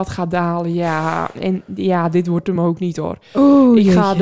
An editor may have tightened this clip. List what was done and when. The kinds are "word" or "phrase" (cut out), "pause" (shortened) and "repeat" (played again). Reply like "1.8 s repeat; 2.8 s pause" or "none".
none